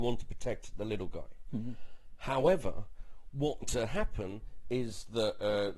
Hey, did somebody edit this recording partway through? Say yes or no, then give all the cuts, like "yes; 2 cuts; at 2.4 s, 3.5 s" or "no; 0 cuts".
yes; 1 cut; at 3.6 s